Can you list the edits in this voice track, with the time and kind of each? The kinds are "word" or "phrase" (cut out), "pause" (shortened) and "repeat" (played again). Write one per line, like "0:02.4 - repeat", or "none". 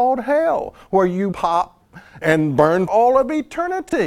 0:01.3 - phrase
0:02.2 - word
0:02.9 - word